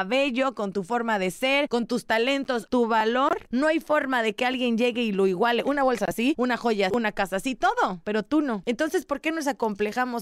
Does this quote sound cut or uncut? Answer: cut